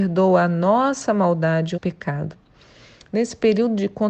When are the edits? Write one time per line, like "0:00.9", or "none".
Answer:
0:01.8